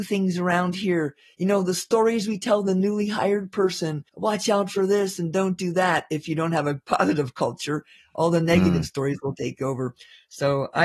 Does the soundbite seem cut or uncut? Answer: cut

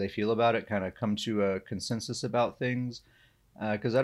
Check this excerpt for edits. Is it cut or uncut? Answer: uncut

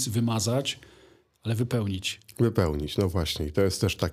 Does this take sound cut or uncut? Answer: uncut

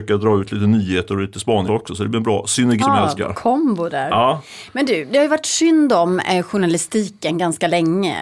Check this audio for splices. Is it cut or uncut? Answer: cut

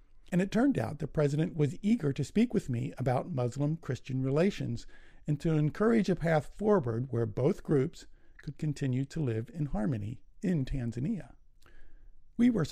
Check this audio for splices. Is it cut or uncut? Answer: uncut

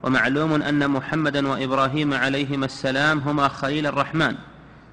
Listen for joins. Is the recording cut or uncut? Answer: uncut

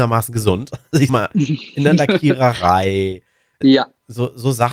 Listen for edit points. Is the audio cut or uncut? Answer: cut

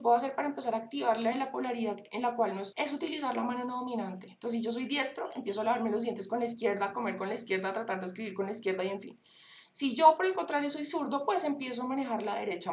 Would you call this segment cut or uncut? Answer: cut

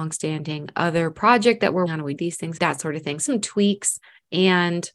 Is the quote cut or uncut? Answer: cut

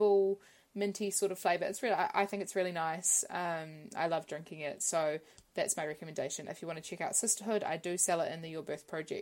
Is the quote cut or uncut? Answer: uncut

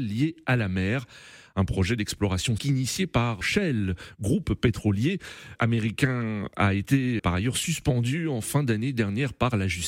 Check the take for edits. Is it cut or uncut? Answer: cut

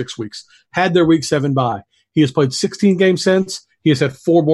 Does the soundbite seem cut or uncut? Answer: uncut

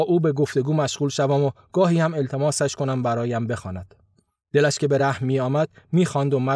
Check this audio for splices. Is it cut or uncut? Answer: uncut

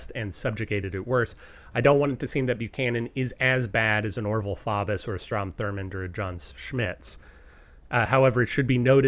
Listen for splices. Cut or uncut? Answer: uncut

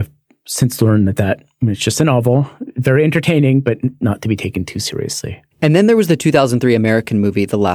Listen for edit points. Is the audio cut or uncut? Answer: cut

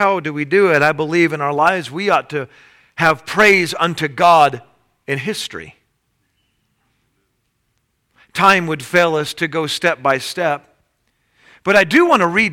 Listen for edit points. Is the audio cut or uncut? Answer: uncut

